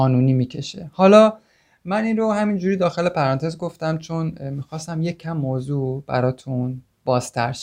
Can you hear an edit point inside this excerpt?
no; 0 cuts

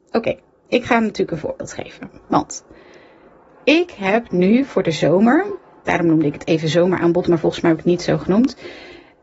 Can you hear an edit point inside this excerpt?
no; 0 cuts

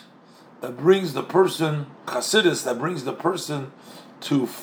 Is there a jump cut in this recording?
yes; 1 cut; at 2.1 s

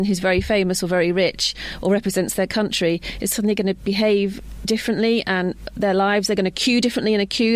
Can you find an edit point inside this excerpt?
no; 0 cuts

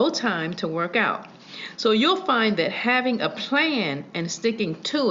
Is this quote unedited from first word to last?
yes; 0 cuts

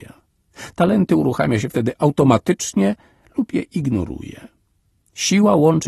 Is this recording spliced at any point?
no; 0 cuts

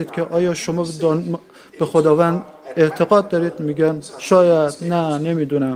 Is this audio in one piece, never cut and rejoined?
no; 1 cut; at 4.1 s

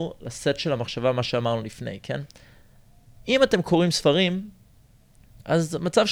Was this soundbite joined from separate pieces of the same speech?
no; 0 cuts

